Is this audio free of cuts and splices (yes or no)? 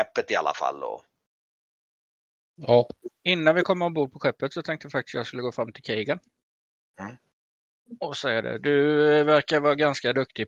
yes